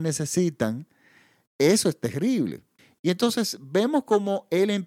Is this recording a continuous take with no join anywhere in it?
no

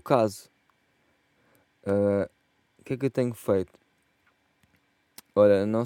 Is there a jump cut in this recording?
no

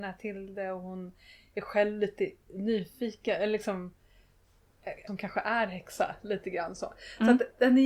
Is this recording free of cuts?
no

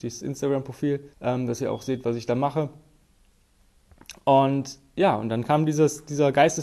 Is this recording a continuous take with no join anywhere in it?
no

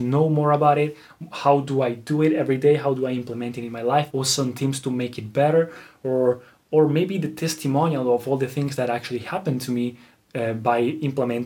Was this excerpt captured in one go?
no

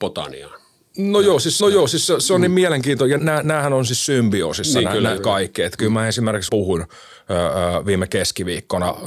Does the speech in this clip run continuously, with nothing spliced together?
no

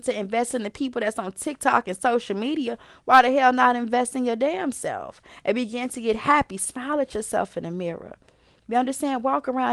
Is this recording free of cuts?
yes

